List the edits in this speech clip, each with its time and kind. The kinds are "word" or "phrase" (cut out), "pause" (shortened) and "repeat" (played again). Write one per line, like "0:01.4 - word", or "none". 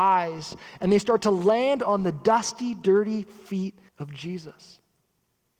0:03.9 - pause